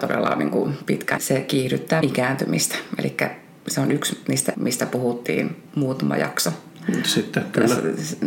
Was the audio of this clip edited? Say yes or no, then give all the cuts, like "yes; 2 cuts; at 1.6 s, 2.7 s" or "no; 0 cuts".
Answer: yes; 4 cuts; at 1.2 s, 2.0 s, 4.5 s, 5.7 s